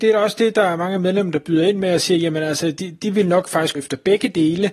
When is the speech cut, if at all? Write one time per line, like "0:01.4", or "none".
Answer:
0:03.7